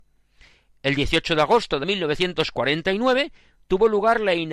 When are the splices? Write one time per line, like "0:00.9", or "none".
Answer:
0:01.8